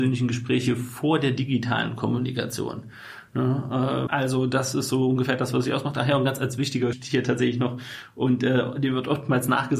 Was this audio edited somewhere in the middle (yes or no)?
yes